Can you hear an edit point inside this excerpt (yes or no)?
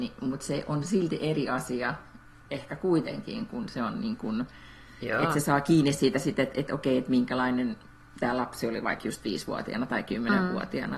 no